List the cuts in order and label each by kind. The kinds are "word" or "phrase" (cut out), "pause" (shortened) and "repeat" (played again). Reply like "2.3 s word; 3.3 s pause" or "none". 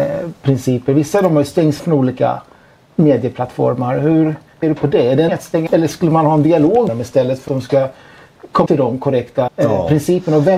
1.8 s word; 4.6 s word; 5.3 s word; 5.7 s word; 6.9 s word; 7.5 s word; 8.7 s word; 9.5 s word